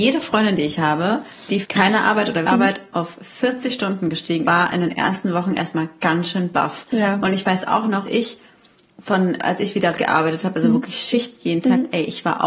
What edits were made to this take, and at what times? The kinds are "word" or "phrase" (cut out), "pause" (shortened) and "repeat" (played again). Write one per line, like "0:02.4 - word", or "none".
0:01.6 - word
0:02.4 - word
0:04.4 - word
0:08.0 - word
0:09.4 - word
0:10.0 - word